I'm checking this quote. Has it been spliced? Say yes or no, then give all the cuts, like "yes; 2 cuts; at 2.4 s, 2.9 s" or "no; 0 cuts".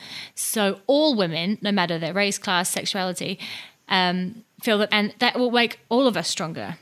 yes; 2 cuts; at 4.5 s, 4.9 s